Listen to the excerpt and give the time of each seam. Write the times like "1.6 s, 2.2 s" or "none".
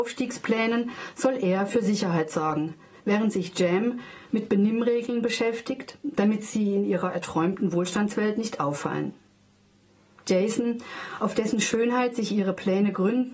none